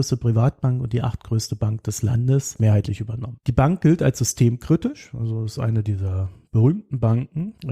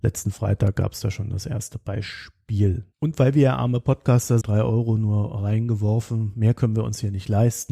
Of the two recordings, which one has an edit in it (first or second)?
second